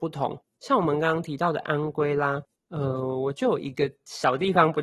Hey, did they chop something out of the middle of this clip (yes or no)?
no